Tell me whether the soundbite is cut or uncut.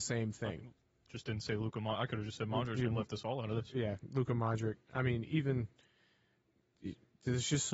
uncut